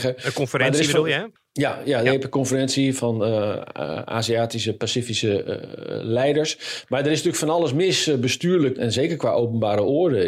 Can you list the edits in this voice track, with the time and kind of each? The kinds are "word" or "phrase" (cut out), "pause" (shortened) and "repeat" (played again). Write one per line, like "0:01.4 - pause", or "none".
0:01.4 - pause
0:03.0 - word
0:08.8 - word